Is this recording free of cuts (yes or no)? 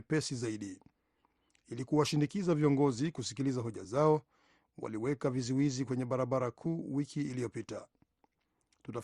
yes